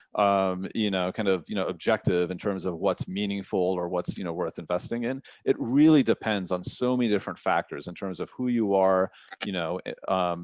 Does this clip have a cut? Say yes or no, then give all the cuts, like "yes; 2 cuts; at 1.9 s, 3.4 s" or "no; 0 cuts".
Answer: no; 0 cuts